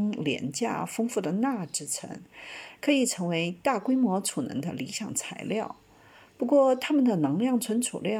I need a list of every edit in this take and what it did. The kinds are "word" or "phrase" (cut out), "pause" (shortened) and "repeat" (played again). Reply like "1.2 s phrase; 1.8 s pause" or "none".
none